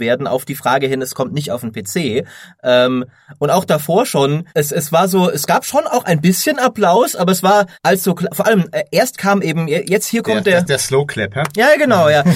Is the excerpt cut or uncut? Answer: cut